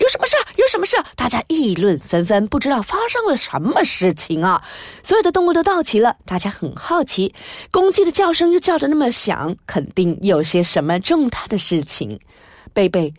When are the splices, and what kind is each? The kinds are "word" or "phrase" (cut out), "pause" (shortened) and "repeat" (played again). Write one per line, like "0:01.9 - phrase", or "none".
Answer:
0:06.2 - pause